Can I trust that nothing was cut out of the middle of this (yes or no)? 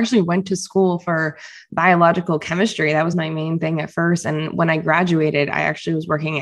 yes